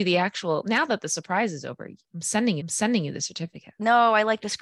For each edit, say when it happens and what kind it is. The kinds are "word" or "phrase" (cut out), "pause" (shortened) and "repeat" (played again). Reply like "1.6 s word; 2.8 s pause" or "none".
2.6 s repeat